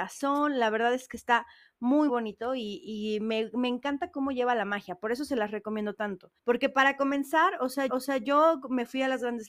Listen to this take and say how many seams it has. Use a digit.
3